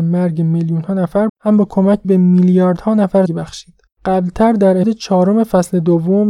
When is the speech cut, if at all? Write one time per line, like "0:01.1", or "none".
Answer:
0:01.3
0:02.0
0:03.3
0:03.9
0:04.8

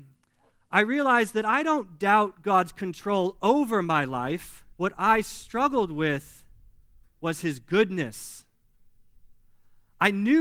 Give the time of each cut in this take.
0:04.7

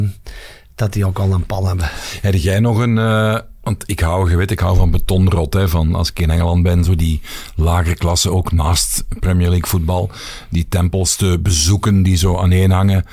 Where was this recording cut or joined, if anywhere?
none

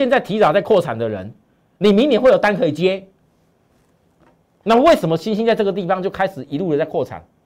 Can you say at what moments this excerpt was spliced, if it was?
none

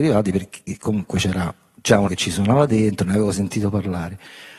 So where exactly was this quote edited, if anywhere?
0:02.1

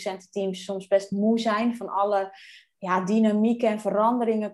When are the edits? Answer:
none

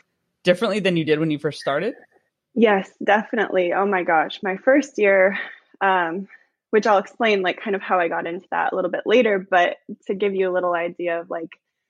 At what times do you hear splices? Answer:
none

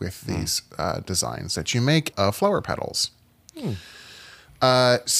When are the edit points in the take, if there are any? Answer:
0:02.1

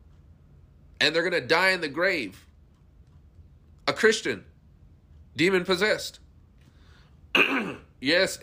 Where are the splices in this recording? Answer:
none

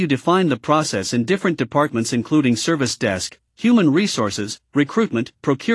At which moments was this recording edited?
none

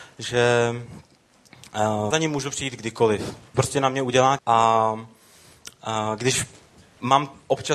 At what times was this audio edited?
0:02.1
0:03.5
0:04.4

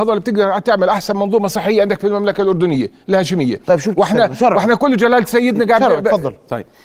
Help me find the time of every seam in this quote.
0:03.0

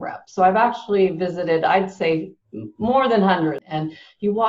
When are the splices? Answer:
none

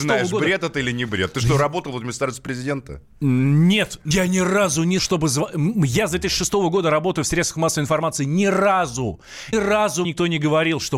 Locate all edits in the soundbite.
0:04.1
0:05.0
0:09.5
0:10.0

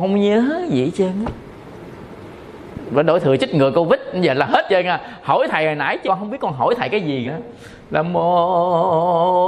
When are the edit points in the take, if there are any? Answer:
0:04.7
0:06.0
0:07.2

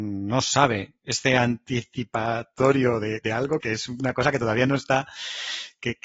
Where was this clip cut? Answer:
0:03.2
0:03.6

